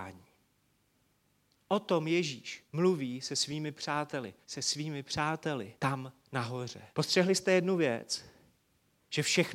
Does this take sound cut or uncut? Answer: cut